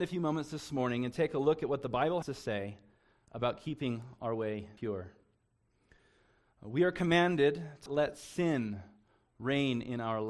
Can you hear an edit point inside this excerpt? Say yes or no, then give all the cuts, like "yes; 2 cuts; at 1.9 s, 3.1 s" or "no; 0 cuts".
yes; 3 cuts; at 2.2 s, 4.8 s, 7.9 s